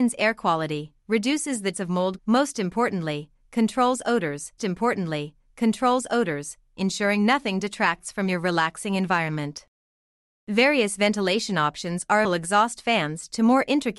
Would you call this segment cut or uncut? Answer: cut